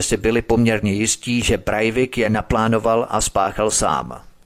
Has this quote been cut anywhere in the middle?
no; 0 cuts

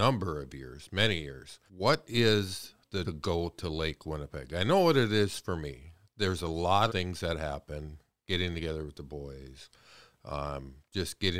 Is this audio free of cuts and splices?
no; 3 cuts; at 1.7 s, 3.0 s, 6.9 s

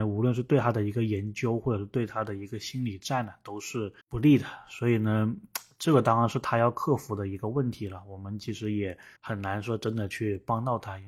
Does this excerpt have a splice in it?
yes; 2 cuts; at 4.0 s, 9.2 s

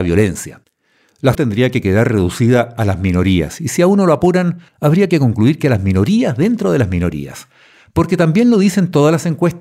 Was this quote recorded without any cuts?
no; 2 cuts; at 1.3 s, 4.7 s

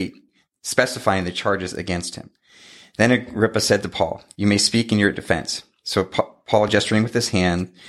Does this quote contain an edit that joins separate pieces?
no; 0 cuts

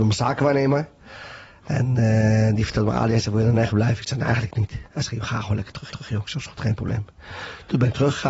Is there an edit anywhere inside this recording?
yes; 1 cut; at 5.9 s

